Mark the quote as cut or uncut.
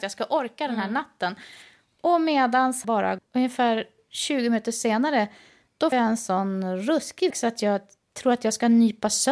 cut